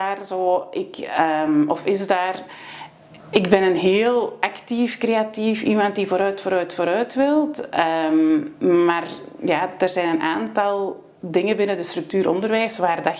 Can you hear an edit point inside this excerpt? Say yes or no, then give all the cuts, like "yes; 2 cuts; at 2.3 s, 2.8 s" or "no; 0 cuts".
yes; 1 cut; at 3.2 s